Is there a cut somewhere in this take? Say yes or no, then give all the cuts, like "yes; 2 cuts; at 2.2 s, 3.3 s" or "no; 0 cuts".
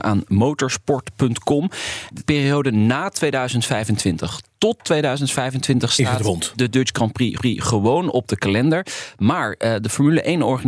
yes; 2 cuts; at 2.2 s, 7.4 s